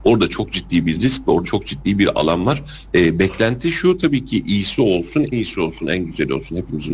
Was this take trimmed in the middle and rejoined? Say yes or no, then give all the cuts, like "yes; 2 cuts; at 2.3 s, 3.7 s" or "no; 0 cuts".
yes; 2 cuts; at 1.4 s, 5.3 s